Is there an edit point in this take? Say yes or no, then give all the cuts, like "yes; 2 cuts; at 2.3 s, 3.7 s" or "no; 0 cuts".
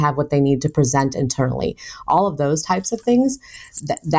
no; 0 cuts